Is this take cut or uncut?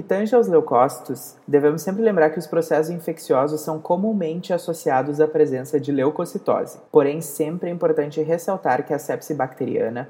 cut